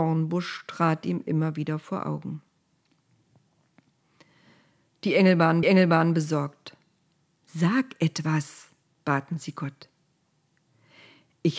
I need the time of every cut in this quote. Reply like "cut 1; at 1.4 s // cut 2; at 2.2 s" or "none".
cut 1; at 5.6 s

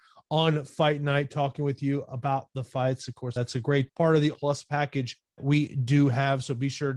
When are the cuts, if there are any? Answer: cut 1; at 3.4 s // cut 2; at 3.9 s // cut 3; at 4.3 s // cut 4; at 5.4 s

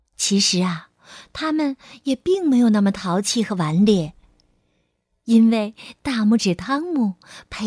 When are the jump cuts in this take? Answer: none

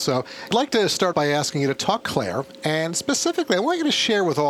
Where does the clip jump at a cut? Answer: cut 1; at 1.1 s // cut 2; at 2.0 s

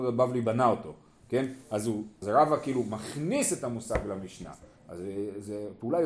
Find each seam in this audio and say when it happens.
cut 1; at 2.2 s

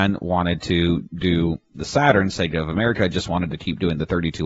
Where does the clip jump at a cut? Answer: cut 1; at 1.1 s

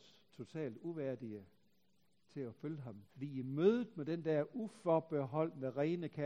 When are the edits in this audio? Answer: cut 1; at 3.1 s

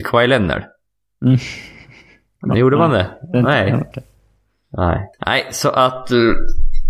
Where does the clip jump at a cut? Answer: cut 1; at 3.9 s // cut 2; at 5.1 s

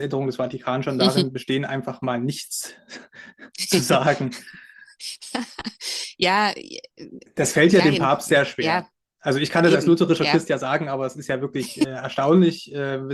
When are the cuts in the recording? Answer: none

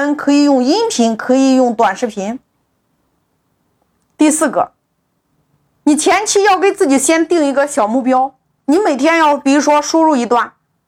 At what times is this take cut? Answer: none

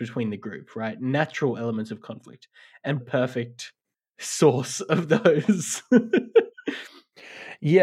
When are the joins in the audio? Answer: cut 1; at 3.0 s // cut 2; at 6.5 s

